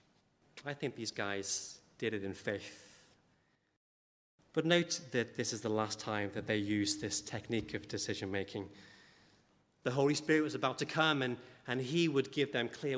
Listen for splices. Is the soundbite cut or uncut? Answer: uncut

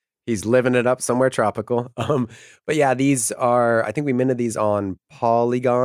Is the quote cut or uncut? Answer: uncut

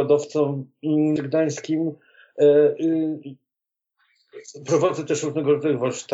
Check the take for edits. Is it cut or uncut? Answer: cut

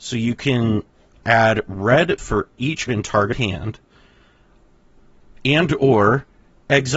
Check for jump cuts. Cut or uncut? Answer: cut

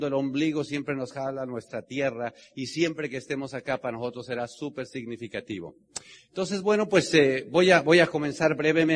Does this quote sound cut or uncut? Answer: uncut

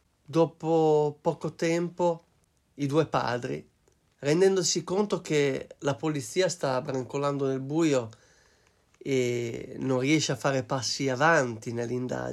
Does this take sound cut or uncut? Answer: uncut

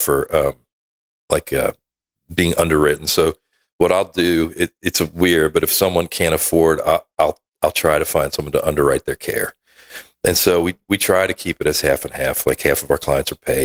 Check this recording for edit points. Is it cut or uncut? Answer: uncut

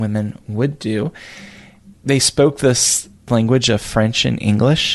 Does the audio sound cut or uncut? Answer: cut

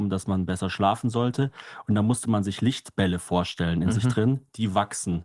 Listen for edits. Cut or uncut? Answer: uncut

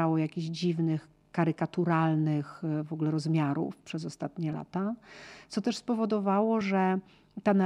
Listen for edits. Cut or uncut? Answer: uncut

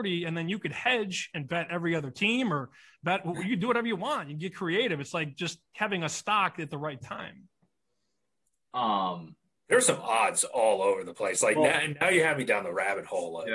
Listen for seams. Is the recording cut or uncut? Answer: uncut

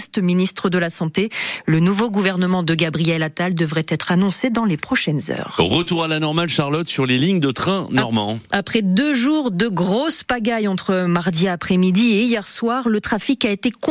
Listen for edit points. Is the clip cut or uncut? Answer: uncut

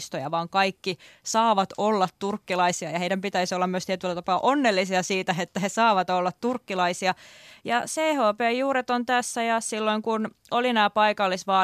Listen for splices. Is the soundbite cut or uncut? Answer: uncut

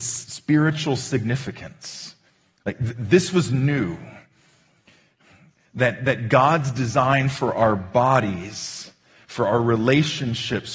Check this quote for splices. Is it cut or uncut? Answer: uncut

